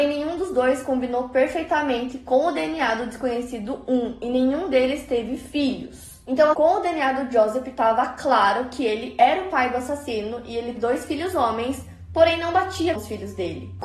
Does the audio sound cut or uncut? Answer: cut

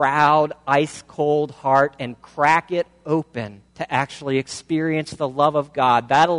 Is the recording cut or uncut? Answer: cut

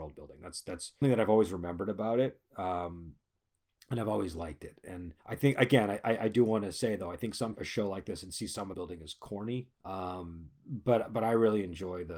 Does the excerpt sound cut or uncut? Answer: cut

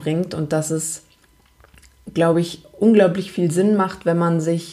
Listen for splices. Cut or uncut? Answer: uncut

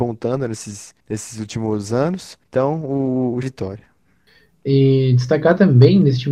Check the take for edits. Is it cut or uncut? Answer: cut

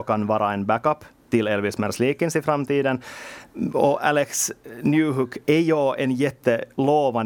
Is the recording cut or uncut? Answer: cut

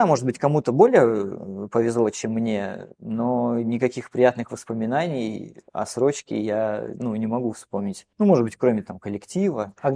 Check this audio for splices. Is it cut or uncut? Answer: cut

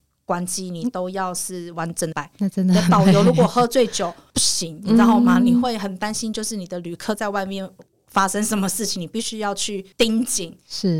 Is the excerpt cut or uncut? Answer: cut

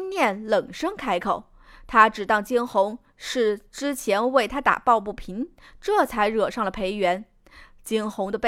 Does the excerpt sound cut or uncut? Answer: uncut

